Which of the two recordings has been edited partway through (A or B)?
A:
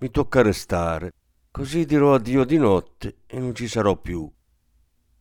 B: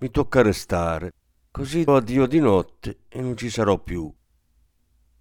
B